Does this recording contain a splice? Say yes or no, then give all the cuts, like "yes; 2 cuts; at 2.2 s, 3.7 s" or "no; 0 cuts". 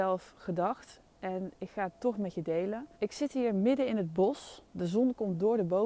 yes; 2 cuts; at 2.9 s, 4.7 s